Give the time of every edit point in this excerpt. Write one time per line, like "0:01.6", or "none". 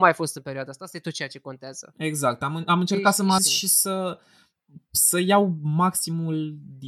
0:03.4